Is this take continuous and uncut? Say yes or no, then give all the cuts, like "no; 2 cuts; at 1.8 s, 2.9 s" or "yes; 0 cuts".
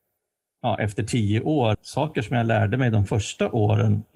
no; 1 cut; at 1.7 s